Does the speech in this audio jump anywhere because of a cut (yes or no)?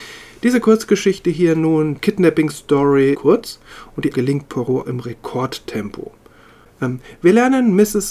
yes